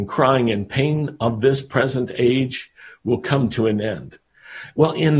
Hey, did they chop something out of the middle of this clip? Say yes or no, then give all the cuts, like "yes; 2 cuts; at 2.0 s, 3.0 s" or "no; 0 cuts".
no; 0 cuts